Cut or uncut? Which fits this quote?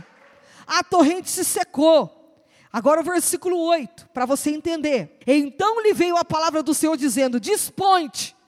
cut